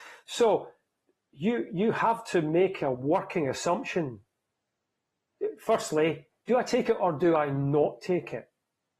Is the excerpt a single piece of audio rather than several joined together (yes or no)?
yes